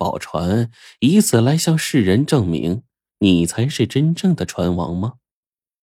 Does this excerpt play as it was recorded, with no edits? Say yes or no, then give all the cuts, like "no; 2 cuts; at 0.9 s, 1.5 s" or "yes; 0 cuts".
yes; 0 cuts